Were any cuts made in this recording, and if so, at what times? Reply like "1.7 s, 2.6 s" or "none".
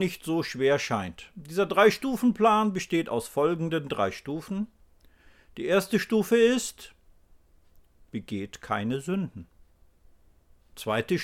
none